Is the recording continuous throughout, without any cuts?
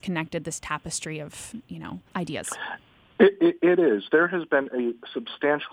no; 1 cut; at 2.1 s

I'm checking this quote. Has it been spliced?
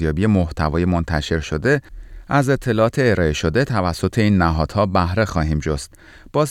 no; 0 cuts

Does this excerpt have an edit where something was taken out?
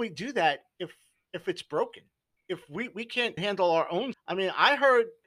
yes; 3 cuts; at 2.4 s, 3.4 s, 4.1 s

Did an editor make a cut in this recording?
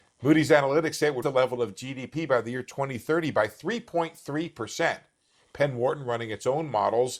yes; 1 cut; at 1.2 s

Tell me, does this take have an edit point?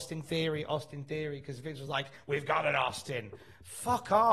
no; 0 cuts

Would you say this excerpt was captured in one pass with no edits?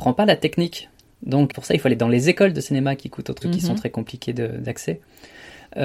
no; 2 cuts; at 1.5 s, 3.4 s

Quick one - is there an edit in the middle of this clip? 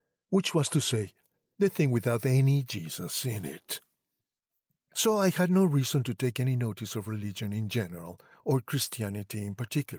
no; 0 cuts

